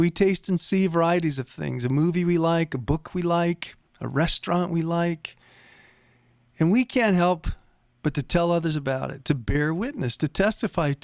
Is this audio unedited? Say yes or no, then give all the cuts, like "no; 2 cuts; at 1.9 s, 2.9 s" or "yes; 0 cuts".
yes; 0 cuts